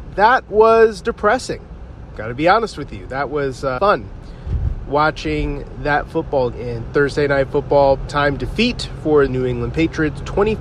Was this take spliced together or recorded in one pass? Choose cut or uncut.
cut